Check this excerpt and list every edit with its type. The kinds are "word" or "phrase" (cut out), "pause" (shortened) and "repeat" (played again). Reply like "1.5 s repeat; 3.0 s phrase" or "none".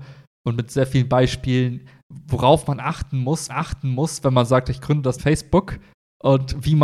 3.5 s repeat; 5.2 s word